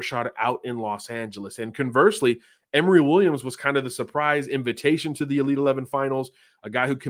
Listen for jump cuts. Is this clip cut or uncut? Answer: uncut